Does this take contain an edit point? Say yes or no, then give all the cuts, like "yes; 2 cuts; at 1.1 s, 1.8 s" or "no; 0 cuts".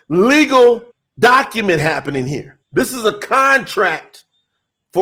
yes; 2 cuts; at 0.9 s, 2.6 s